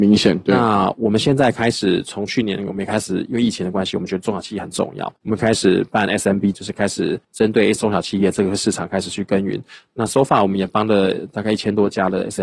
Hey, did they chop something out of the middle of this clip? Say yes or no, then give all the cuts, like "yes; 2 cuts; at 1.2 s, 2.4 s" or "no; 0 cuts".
yes; 4 cuts; at 5.2 s, 6.5 s, 7.2 s, 7.7 s